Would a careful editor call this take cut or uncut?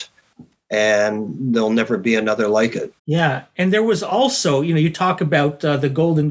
cut